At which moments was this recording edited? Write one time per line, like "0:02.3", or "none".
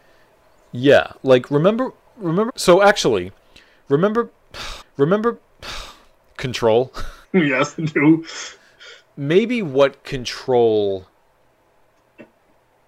0:02.5
0:04.8
0:07.2